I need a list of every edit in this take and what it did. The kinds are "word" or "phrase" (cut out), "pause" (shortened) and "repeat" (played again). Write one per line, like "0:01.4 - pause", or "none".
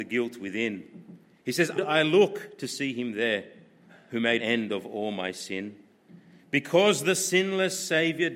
0:01.8 - word
0:04.4 - word